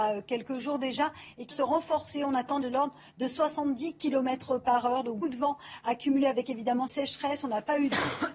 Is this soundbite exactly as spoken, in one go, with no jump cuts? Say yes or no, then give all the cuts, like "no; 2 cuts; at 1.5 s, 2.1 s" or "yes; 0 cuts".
no; 4 cuts; at 1.5 s, 2.6 s, 5.2 s, 6.9 s